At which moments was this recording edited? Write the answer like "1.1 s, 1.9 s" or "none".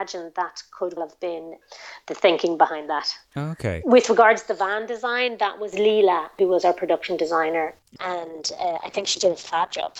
1.0 s